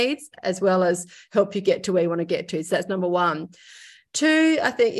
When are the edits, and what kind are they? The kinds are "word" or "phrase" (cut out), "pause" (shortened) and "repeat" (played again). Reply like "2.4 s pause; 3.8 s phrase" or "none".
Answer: none